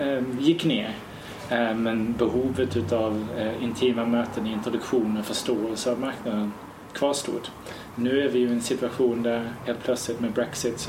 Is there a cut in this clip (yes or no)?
no